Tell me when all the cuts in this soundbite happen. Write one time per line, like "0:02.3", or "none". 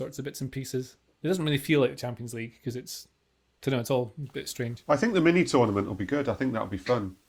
none